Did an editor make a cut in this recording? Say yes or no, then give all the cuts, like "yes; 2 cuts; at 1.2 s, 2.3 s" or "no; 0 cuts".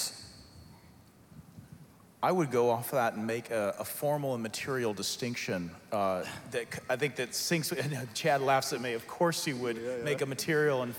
no; 0 cuts